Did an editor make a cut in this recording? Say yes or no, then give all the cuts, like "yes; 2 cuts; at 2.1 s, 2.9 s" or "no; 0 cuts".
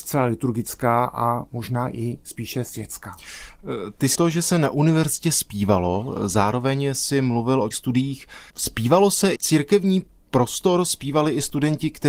yes; 4 cuts; at 4.1 s, 7.7 s, 8.5 s, 9.4 s